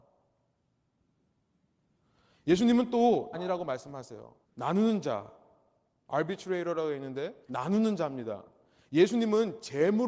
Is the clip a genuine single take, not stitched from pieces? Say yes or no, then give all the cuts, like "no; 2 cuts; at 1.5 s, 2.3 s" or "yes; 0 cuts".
no; 3 cuts; at 3.3 s, 4.4 s, 7.4 s